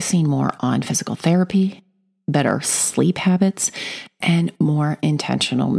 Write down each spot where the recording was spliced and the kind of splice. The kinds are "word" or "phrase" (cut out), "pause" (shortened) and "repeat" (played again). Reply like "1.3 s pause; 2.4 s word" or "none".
none